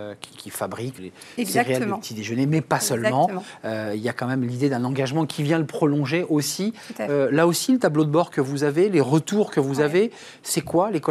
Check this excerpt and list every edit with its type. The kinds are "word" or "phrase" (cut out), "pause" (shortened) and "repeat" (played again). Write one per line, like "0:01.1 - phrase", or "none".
0:01.0 - word

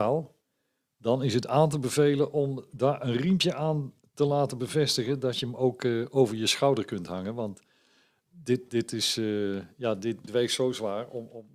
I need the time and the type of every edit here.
0:10.3 - word

